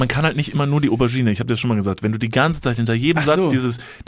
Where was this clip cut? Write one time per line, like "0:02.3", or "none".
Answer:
none